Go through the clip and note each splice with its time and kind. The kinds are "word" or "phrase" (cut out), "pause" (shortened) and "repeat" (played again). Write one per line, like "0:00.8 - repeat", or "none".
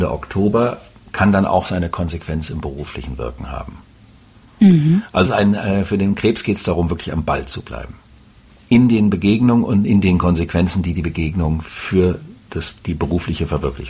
0:05.3 - word